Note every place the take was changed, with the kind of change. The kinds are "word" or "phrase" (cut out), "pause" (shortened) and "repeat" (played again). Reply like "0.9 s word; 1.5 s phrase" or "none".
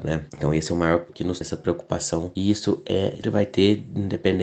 1.1 s word; 1.4 s word; 3.2 s word